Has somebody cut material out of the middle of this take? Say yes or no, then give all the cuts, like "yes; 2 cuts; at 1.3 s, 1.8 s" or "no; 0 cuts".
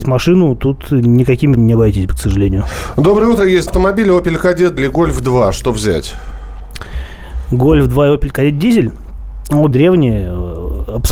yes; 4 cuts; at 1.6 s, 3.7 s, 4.8 s, 9.7 s